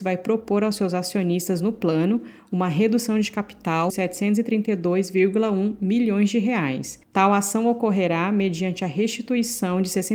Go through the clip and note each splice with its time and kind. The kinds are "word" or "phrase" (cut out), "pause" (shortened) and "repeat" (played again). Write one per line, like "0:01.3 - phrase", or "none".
0:03.9 - phrase
0:07.0 - pause